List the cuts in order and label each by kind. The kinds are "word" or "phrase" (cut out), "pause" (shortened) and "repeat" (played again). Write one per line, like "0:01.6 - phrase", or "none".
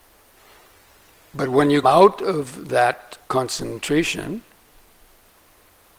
0:01.8 - word
0:03.2 - pause